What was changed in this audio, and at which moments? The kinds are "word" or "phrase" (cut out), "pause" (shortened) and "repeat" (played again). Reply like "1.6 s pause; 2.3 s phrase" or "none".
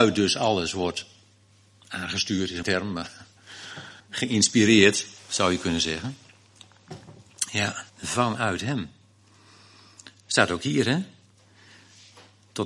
2.6 s word; 4.0 s pause; 7.9 s pause